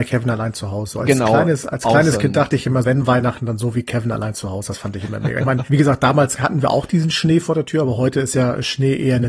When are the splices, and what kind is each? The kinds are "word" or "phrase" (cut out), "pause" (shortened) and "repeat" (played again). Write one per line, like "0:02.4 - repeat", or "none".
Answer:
0:02.8 - word